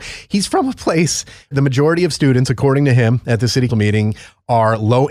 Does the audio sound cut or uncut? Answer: cut